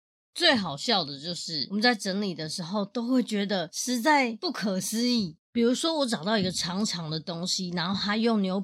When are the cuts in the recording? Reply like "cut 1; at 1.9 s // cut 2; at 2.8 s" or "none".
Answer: cut 1; at 5.4 s